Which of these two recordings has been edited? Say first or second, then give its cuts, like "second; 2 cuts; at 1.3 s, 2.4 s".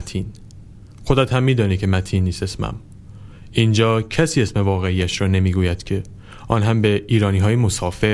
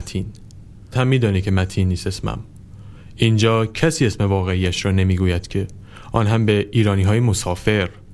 second; 1 cut; at 0.9 s